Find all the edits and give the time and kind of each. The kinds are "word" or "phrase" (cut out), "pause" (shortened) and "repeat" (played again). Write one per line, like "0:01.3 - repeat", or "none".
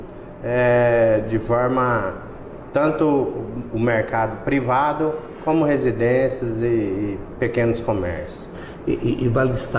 none